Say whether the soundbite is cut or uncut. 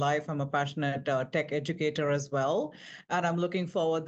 uncut